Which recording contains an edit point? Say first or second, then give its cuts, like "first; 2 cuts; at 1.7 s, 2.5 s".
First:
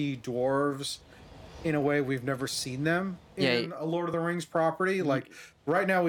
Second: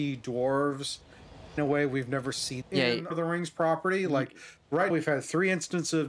second; 4 cuts; at 1.6 s, 2.6 s, 3.1 s, 4.9 s